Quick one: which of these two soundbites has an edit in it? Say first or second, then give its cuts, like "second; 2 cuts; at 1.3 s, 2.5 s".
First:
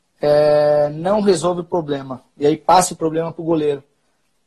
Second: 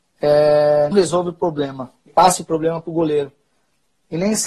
second; 2 cuts; at 0.9 s, 2.1 s